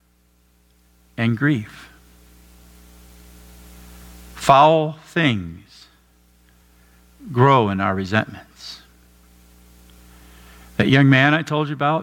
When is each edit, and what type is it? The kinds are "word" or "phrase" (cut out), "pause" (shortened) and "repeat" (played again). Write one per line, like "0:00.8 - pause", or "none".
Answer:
none